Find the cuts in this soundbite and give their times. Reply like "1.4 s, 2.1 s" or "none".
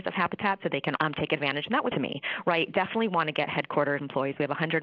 1.0 s, 1.9 s